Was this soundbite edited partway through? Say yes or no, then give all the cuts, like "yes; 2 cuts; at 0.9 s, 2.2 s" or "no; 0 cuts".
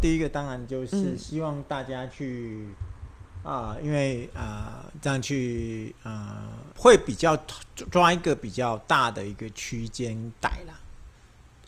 yes; 1 cut; at 6.7 s